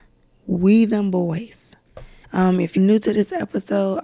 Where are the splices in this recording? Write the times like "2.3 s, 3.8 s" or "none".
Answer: 2.2 s, 2.8 s